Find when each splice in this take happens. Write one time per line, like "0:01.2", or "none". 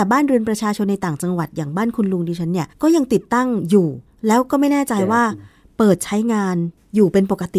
0:02.7
0:04.1

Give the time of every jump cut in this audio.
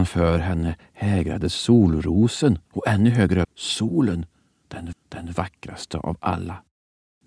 0:02.7
0:03.4
0:04.9

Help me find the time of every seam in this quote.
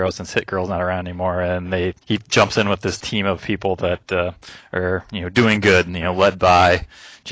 0:02.0

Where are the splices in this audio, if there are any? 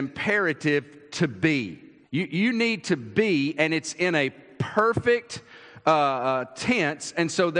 0:02.0

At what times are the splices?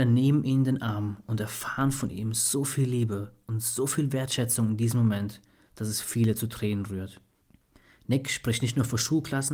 none

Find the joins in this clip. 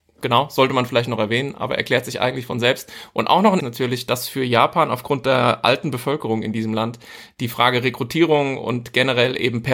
0:03.6

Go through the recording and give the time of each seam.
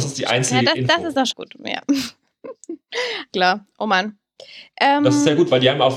0:01.3
0:03.3

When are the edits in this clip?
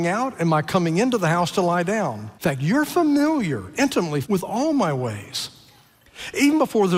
0:02.4
0:04.2

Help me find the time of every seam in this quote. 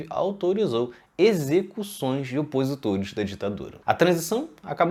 0:03.8

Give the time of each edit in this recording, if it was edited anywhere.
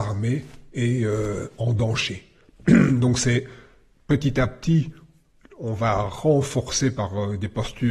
none

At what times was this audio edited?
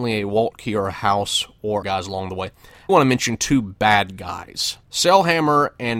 0:01.8
0:02.9
0:04.8

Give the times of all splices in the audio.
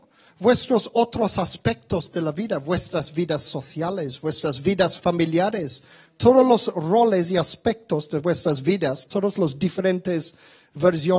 none

